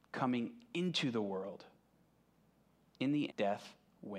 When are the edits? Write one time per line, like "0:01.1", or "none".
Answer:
0:03.3